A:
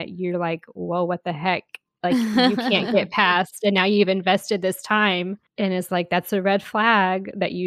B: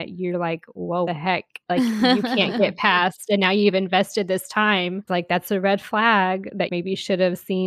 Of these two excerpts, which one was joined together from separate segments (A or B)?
B